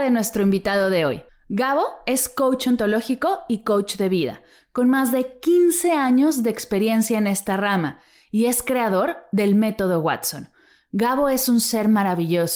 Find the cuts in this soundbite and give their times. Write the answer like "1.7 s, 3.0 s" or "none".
1.3 s